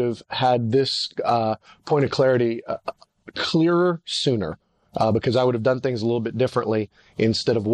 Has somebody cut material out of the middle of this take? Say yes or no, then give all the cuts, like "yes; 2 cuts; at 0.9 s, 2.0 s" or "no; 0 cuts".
no; 0 cuts